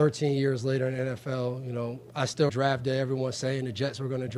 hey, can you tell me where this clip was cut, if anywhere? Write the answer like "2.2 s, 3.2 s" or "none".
2.5 s